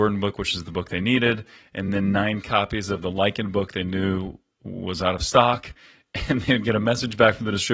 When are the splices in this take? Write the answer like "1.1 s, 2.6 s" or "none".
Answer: none